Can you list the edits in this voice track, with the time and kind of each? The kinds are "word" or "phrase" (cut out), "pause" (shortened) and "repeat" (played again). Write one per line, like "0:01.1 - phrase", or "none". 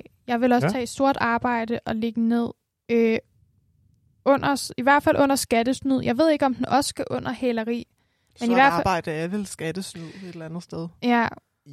none